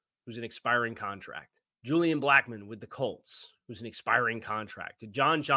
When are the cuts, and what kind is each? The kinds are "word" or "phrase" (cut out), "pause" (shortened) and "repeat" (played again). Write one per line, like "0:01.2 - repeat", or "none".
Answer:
0:01.7 - pause